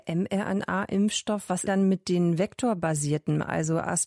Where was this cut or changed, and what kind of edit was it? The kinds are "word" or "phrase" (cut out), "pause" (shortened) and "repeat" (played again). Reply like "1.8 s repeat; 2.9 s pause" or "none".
1.7 s phrase